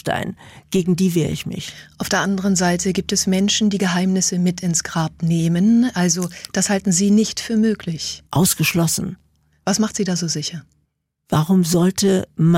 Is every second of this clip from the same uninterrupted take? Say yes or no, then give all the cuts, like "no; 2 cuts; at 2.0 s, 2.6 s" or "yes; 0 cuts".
no; 2 cuts; at 8.3 s, 10.9 s